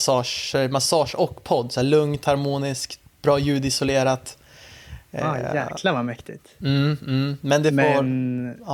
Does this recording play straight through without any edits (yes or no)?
yes